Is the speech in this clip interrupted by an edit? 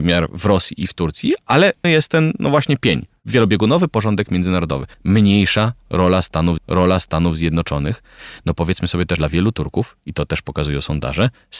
yes; 4 cuts; at 1.8 s, 4.9 s, 6.6 s, 9.2 s

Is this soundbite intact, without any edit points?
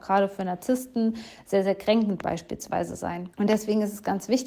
no; 1 cut; at 3.3 s

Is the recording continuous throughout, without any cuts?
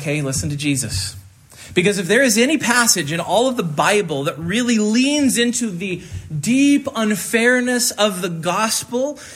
yes; 0 cuts

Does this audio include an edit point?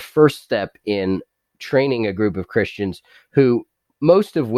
no; 0 cuts

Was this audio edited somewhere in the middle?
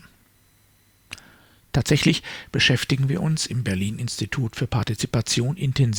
no; 0 cuts

